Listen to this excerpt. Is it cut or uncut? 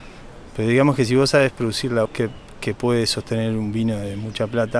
cut